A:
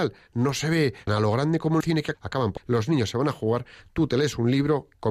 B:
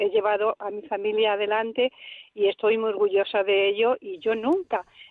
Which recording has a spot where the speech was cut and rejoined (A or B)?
A